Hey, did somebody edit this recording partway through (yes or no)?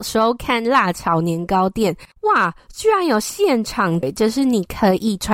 yes